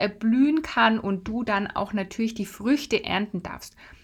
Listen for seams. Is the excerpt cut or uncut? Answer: uncut